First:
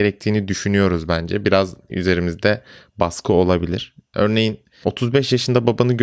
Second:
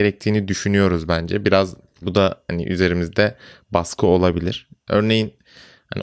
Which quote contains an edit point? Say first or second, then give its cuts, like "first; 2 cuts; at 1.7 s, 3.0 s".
first; 2 cuts; at 1.9 s, 4.8 s